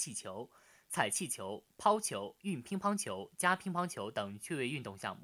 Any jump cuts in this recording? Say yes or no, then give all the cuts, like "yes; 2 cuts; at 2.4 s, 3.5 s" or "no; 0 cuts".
no; 0 cuts